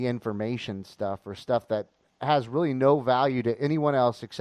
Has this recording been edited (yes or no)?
no